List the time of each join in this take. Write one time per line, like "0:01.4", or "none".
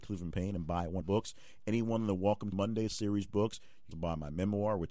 0:01.0
0:02.5
0:03.9